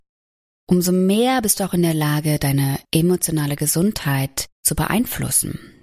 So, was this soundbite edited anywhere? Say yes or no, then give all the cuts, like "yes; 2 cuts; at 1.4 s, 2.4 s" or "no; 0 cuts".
yes; 2 cuts; at 2.8 s, 4.5 s